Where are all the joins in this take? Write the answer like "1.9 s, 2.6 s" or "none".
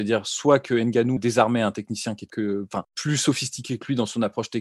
1.2 s, 2.3 s, 2.8 s